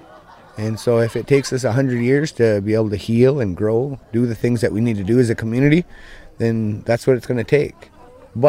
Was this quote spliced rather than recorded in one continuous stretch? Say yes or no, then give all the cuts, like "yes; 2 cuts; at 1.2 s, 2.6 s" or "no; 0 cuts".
yes; 1 cut; at 4.0 s